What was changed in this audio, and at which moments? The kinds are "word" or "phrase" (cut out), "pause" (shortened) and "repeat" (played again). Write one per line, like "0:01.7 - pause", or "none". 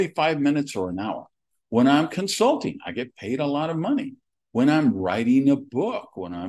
none